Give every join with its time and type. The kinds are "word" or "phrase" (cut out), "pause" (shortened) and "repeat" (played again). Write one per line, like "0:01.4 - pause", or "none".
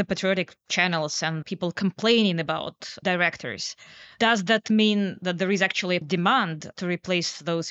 0:06.0 - word